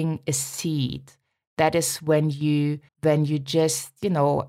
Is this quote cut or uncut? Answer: cut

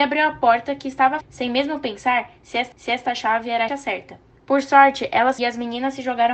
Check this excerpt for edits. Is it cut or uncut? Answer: cut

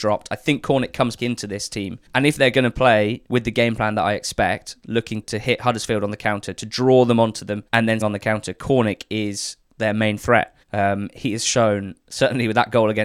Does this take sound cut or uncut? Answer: cut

